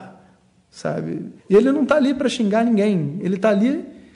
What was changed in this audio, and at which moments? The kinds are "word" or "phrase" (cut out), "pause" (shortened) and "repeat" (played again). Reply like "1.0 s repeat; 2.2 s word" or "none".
1.4 s pause